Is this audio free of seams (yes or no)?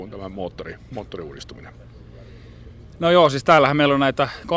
yes